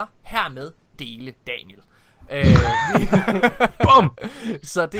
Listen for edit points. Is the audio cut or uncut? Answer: cut